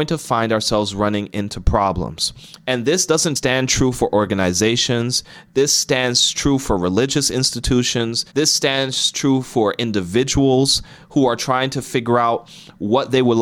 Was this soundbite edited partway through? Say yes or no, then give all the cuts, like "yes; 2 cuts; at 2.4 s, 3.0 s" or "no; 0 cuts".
yes; 2 cuts; at 3.4 s, 8.3 s